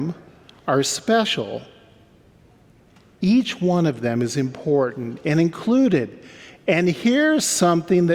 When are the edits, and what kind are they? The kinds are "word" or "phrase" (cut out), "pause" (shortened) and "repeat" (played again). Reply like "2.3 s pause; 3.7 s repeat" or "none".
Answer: none